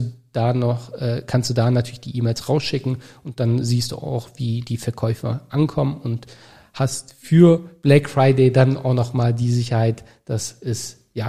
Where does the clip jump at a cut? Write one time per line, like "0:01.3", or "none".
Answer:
none